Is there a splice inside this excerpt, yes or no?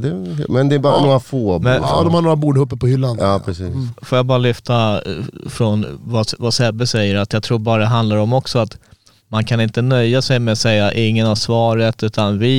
no